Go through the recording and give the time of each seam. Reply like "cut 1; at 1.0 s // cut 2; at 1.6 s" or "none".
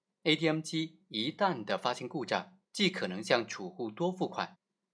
cut 1; at 2.6 s